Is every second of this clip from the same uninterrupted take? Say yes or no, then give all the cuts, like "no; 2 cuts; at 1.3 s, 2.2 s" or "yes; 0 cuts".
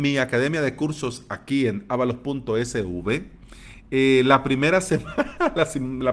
yes; 0 cuts